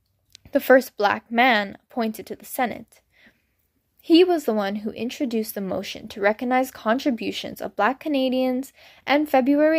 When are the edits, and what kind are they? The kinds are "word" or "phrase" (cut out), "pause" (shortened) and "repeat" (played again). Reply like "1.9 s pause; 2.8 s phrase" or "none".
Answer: none